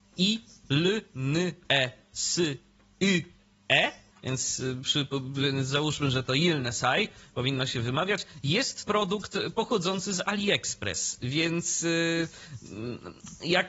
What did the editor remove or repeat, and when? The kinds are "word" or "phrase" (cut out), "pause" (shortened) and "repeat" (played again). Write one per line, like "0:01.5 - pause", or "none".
0:04.1 - pause
0:08.8 - word